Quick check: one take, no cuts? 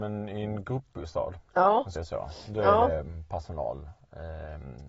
no; 1 cut; at 2.0 s

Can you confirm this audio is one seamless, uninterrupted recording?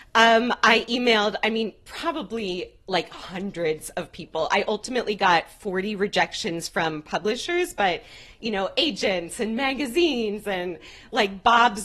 yes; 0 cuts

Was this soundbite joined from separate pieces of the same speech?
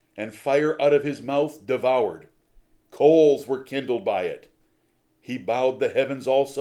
no; 0 cuts

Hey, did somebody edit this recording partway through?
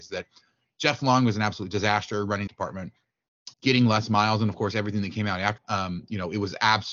yes; 3 cuts; at 2.5 s, 3.5 s, 5.6 s

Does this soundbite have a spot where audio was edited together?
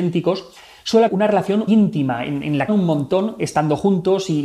yes; 3 cuts; at 1.1 s, 1.7 s, 2.7 s

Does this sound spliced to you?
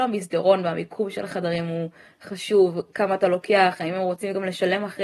no; 0 cuts

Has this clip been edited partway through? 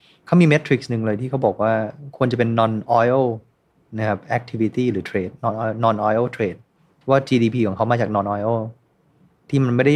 no; 0 cuts

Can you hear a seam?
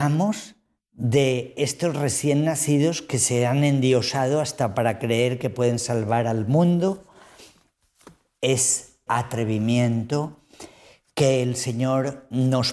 yes; 1 cut; at 9.1 s

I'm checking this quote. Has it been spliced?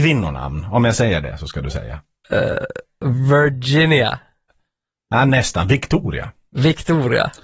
no; 0 cuts

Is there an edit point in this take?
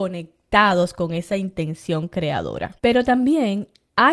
yes; 1 cut; at 2.8 s

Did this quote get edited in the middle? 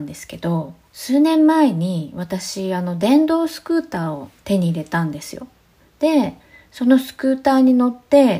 no; 0 cuts

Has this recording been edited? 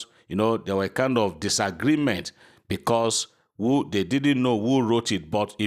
no; 0 cuts

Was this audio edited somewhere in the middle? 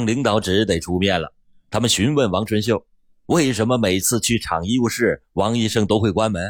no; 0 cuts

